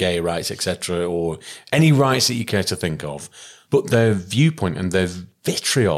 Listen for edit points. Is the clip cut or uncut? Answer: uncut